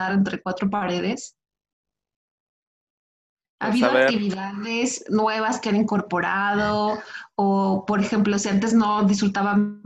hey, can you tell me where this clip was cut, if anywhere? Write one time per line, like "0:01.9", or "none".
none